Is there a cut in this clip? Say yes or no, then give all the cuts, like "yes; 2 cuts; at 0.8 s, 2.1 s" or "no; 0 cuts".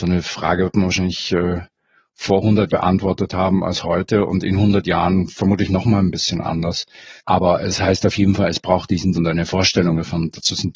yes; 3 cuts; at 2.7 s, 7.2 s, 9.1 s